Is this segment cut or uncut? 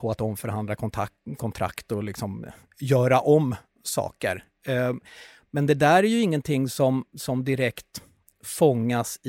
uncut